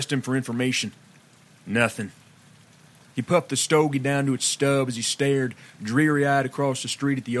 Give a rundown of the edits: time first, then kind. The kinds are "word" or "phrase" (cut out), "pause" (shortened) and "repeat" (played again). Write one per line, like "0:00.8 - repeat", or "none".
none